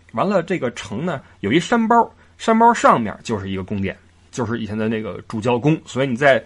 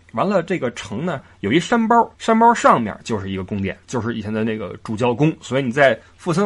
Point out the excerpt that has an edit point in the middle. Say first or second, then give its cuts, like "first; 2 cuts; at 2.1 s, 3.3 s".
second; 2 cuts; at 2.2 s, 3.8 s